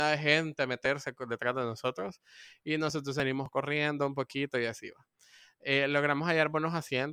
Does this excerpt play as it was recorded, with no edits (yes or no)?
yes